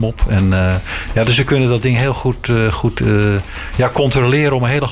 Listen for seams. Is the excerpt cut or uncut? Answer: uncut